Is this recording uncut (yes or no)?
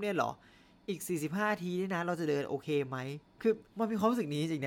no